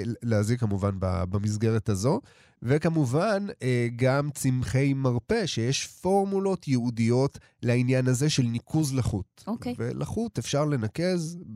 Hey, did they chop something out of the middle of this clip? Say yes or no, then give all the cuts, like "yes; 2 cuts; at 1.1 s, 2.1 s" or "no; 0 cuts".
no; 0 cuts